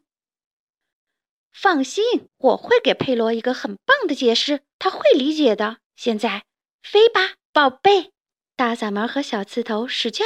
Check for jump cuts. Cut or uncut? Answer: cut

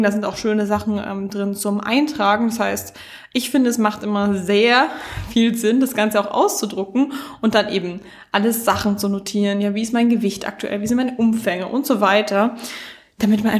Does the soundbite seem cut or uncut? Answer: uncut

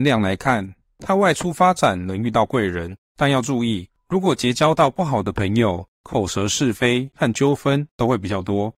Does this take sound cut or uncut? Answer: cut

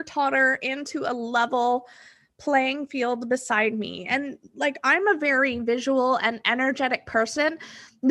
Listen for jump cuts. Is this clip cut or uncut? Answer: uncut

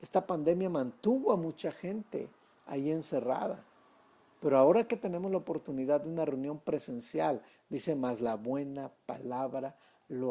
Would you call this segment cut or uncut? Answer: uncut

